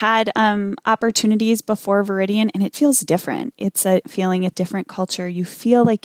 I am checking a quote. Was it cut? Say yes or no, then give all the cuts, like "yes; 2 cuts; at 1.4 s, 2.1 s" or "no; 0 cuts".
yes; 3 cuts; at 2.7 s, 4.0 s, 4.5 s